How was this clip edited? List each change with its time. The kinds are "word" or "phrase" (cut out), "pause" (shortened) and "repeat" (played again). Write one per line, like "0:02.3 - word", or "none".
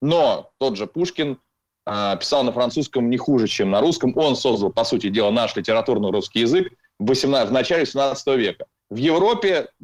none